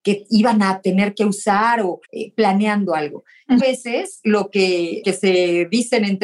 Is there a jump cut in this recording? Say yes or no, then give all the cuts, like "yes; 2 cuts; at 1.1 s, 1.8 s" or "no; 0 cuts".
yes; 3 cuts; at 2.0 s, 3.6 s, 5.0 s